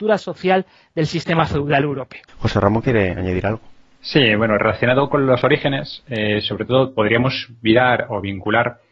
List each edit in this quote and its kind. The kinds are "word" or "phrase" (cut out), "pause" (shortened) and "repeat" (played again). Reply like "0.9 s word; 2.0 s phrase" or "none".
2.3 s pause